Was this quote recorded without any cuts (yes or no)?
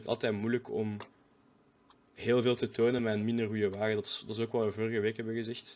yes